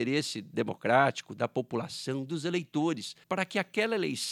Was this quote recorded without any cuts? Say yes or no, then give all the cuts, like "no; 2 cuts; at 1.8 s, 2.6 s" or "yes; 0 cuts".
no; 1 cut; at 3.2 s